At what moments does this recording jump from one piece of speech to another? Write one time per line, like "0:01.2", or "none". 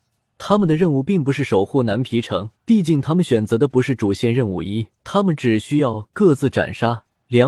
0:02.5
0:05.0

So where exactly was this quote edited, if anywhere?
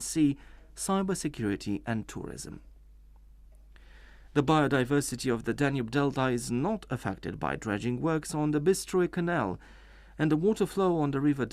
none

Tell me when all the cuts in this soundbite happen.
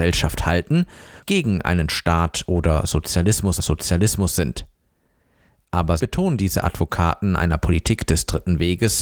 0:01.2
0:01.9
0:03.6
0:06.0

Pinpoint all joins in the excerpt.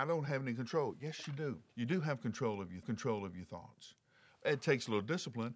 0:01.7
0:02.8

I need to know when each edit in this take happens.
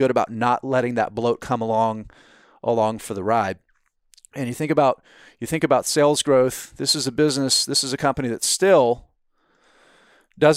none

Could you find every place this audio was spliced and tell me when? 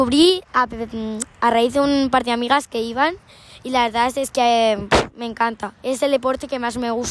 0:05.8

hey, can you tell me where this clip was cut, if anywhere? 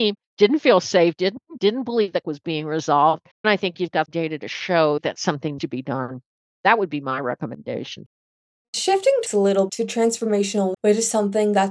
0:01.6
0:02.2
0:03.4
0:04.1
0:05.6
0:09.3
0:09.7
0:10.7

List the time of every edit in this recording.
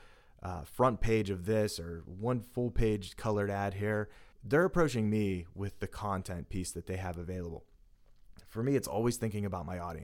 0:04.3

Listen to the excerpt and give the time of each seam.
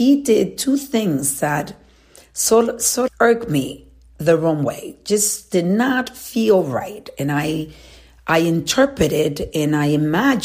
0:03.1

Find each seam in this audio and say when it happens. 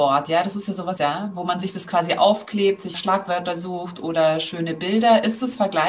0:01.0
0:02.9

